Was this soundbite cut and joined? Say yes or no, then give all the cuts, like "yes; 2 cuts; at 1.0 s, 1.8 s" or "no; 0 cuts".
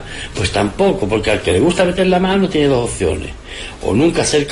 no; 0 cuts